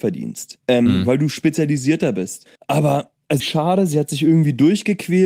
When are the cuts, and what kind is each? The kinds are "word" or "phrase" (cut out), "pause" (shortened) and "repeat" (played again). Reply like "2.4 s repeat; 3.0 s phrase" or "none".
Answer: 2.6 s pause; 3.4 s phrase